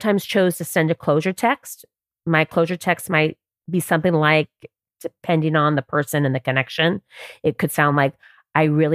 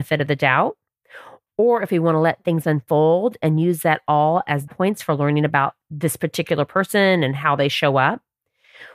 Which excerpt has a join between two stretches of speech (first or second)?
second